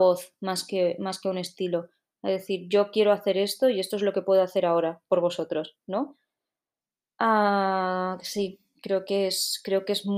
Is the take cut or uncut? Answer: uncut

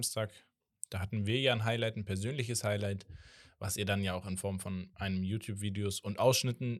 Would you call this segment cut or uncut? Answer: uncut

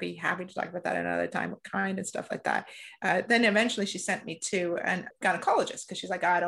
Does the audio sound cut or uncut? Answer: uncut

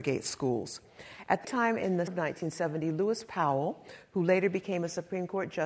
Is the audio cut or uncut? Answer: cut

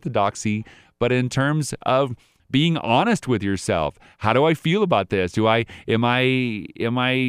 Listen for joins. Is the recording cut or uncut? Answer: uncut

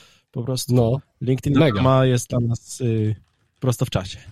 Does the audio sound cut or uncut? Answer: uncut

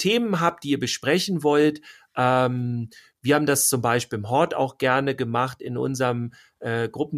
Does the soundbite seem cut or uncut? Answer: uncut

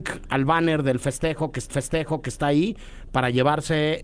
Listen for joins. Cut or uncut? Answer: cut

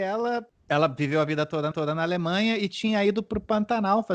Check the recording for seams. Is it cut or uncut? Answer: cut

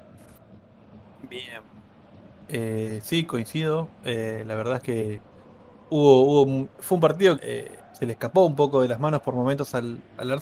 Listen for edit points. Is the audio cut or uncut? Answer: cut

